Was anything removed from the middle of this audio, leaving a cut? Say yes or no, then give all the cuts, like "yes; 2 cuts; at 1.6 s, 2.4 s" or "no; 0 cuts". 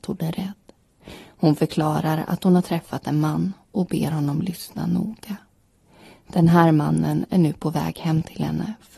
no; 0 cuts